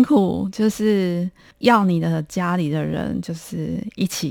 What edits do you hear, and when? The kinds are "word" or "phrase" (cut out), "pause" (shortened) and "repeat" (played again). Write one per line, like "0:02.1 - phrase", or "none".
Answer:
0:01.5 - pause